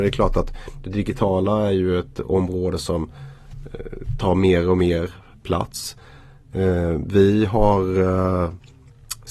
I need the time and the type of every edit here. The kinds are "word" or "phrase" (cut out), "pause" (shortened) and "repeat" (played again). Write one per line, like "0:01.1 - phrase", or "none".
none